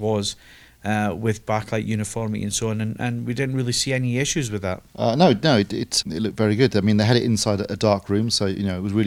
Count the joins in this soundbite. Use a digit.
2